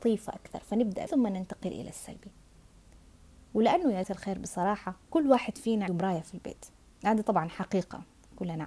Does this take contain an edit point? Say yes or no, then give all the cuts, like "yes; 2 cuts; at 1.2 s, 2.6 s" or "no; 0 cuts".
yes; 6 cuts; at 1.1 s, 2.9 s, 4.0 s, 5.0 s, 5.9 s, 6.8 s